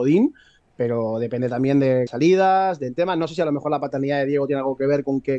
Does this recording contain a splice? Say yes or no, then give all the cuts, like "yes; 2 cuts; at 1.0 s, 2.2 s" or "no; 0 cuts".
yes; 1 cut; at 2.1 s